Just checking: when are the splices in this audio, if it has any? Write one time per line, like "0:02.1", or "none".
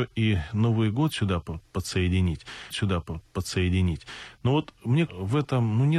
0:02.7
0:05.1